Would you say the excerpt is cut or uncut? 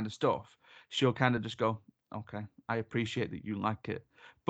uncut